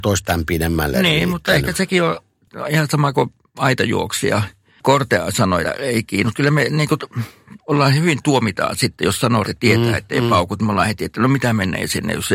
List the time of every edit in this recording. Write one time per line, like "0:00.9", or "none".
0:05.6
0:09.4